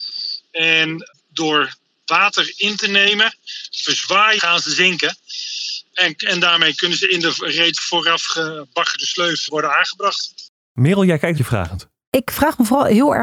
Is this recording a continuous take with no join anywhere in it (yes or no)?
no